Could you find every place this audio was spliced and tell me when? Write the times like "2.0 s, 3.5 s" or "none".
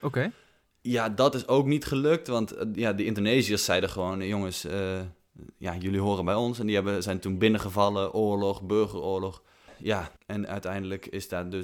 10.2 s